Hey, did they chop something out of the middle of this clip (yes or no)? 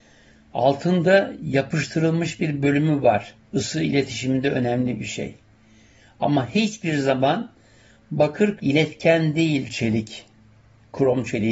yes